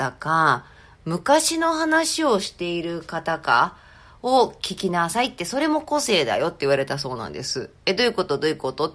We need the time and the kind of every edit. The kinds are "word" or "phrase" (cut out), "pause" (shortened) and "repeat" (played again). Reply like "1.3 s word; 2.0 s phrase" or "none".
none